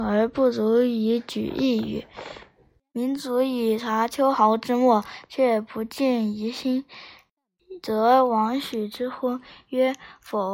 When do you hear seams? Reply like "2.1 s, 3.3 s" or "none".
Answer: none